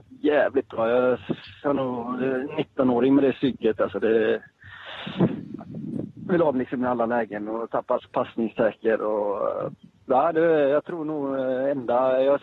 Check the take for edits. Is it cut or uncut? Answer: cut